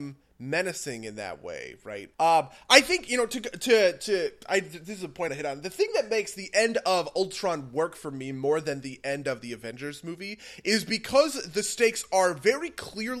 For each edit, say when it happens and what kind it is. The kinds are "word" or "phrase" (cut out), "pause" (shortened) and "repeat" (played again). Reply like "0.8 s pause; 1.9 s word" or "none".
2.1 s pause; 5.3 s phrase